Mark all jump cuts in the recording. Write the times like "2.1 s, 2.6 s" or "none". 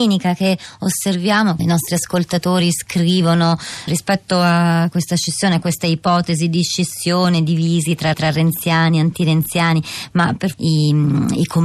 1.6 s, 3.9 s, 8.1 s, 10.5 s